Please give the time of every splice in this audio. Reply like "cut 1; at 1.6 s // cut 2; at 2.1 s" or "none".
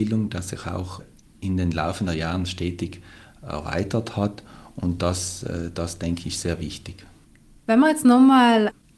none